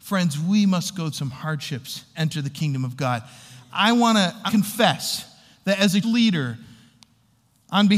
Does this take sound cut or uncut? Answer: cut